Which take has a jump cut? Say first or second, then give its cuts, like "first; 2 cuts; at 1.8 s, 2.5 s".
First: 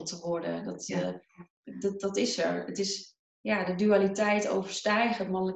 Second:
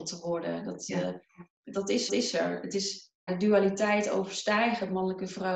second; 3 cuts; at 1.7 s, 2.1 s, 3.3 s